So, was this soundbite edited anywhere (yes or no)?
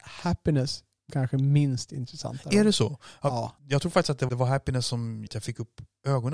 yes